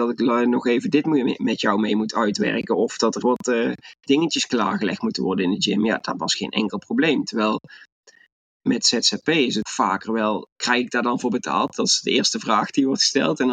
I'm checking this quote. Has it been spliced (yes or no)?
yes